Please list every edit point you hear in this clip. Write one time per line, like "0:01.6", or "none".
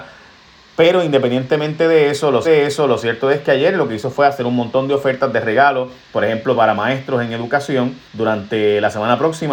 0:02.4
0:08.0